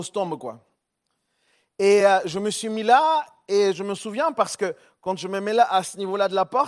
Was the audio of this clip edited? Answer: no; 0 cuts

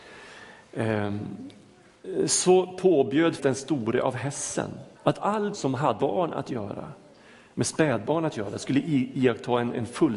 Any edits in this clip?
yes; 4 cuts; at 3.4 s, 5.0 s, 5.5 s, 6.0 s

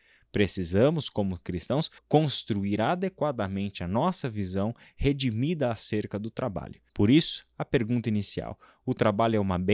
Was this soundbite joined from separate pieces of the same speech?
yes; 2 cuts; at 2.0 s, 6.9 s

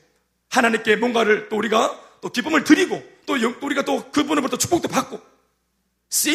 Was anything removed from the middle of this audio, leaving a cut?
no; 0 cuts

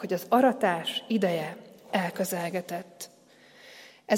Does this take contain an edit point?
no; 0 cuts

